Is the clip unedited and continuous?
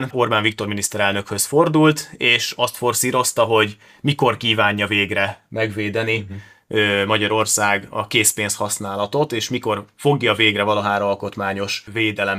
yes; 0 cuts

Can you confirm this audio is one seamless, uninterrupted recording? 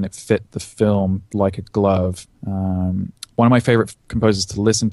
yes; 0 cuts

